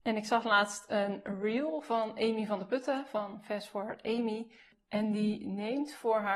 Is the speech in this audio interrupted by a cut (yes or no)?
no